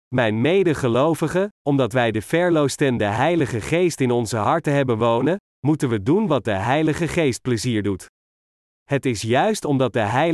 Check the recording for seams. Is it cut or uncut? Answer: uncut